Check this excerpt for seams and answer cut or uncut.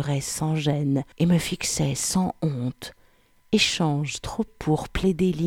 cut